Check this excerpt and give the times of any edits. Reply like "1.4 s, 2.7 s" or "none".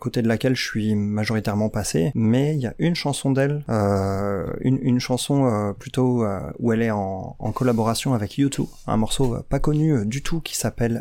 none